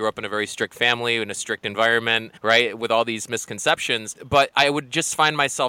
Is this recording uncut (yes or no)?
no